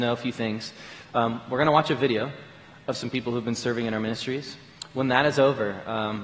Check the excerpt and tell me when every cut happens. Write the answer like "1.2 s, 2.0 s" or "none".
none